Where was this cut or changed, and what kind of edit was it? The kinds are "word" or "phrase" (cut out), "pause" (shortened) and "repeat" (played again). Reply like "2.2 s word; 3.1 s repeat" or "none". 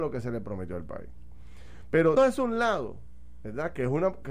2.2 s word